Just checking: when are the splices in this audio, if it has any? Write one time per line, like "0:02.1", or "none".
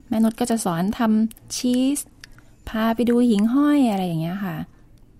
none